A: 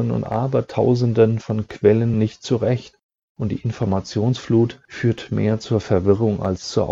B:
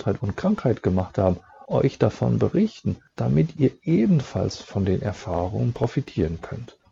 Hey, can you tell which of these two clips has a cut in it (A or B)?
B